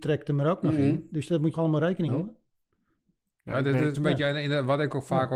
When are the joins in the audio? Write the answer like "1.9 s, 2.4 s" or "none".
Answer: 1.5 s, 2.1 s, 3.9 s

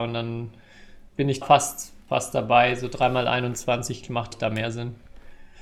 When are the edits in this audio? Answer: 1.1 s, 1.4 s, 2.0 s, 4.3 s

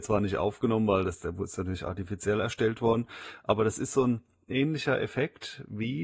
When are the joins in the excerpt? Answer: none

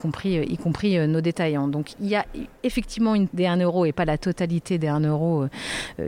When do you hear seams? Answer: 3.3 s

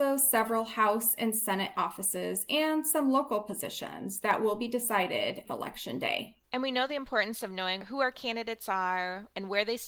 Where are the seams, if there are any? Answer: none

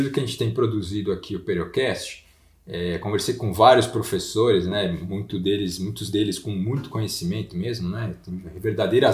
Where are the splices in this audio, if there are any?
none

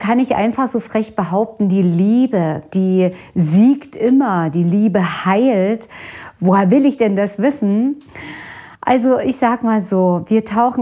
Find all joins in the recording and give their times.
8.8 s

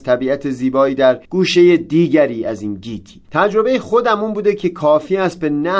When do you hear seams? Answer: 1.2 s, 3.2 s

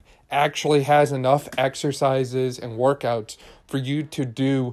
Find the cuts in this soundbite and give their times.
none

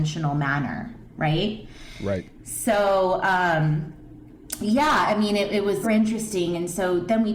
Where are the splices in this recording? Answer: 5.8 s

